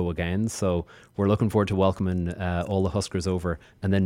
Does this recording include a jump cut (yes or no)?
no